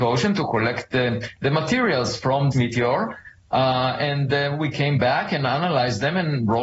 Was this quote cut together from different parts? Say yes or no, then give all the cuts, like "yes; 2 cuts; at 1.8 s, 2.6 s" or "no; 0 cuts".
yes; 1 cut; at 2.5 s